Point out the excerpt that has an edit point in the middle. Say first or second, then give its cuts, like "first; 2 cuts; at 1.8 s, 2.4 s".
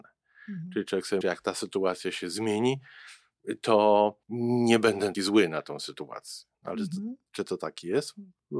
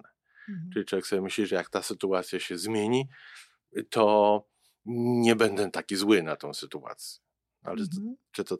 first; 4 cuts; at 1.2 s, 4.2 s, 5.1 s, 6.5 s